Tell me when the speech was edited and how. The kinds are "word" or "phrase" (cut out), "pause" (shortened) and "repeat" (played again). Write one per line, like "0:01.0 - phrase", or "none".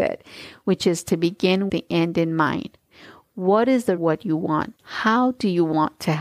0:01.7 - word
0:04.0 - phrase
0:04.8 - pause